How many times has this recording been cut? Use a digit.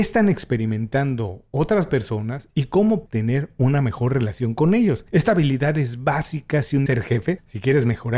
2